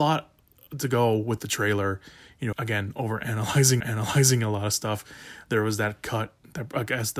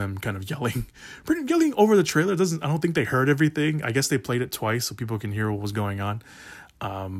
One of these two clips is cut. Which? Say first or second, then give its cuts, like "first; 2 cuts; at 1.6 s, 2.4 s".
first; 2 cuts; at 2.5 s, 3.8 s